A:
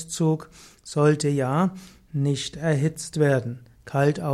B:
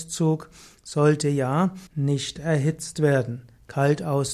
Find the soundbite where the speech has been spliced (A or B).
B